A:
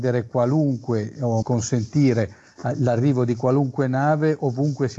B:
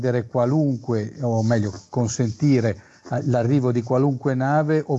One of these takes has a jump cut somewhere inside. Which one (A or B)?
A